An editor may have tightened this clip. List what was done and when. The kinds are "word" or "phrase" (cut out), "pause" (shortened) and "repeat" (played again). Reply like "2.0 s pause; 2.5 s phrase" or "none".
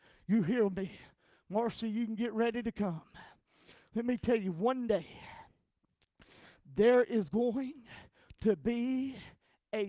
none